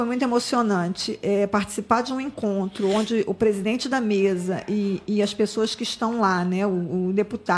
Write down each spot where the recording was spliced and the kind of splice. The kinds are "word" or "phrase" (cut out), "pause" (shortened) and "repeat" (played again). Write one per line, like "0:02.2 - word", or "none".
none